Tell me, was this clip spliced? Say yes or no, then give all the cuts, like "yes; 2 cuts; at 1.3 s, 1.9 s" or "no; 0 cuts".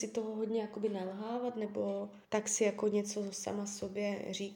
yes; 1 cut; at 2.2 s